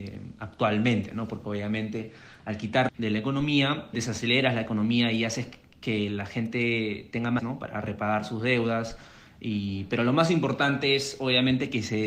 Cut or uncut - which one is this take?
cut